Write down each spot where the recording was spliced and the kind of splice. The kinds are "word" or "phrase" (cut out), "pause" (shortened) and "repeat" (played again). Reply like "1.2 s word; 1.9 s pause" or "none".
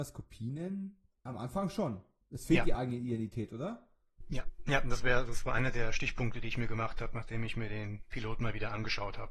none